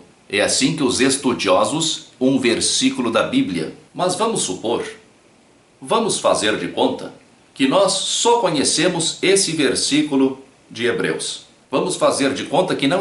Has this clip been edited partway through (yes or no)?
yes